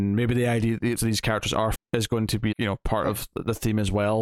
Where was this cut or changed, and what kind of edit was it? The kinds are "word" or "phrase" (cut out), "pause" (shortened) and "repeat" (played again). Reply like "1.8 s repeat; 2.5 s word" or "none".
1.0 s word; 1.7 s word; 2.5 s word